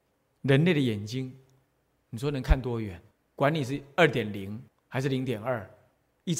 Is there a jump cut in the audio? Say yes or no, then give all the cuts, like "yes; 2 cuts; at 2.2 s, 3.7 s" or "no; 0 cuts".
yes; 2 cuts; at 3.1 s, 4.7 s